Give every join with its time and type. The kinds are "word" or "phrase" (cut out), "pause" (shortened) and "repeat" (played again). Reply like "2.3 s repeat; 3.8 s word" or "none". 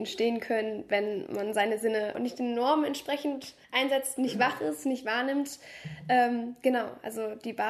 3.6 s pause

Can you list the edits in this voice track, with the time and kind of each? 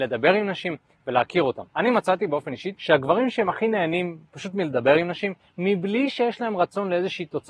1.7 s pause

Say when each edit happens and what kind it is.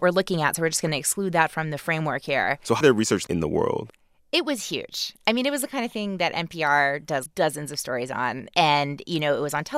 2.8 s word; 3.3 s word; 7.3 s word

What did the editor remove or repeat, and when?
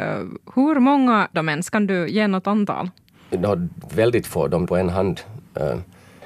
1.3 s word; 4.7 s phrase

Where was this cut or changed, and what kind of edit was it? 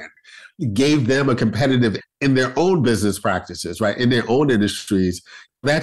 2.0 s word

